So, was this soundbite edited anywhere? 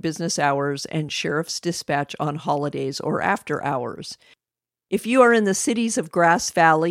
no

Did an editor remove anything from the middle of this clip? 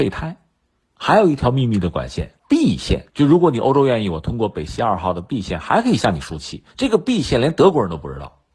yes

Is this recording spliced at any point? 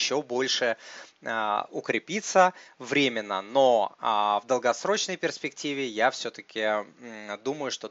no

